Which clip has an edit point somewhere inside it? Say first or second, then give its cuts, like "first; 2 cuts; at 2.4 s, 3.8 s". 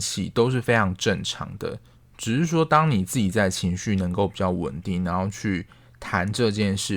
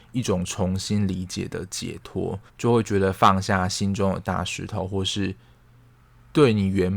second; 1 cut; at 2.5 s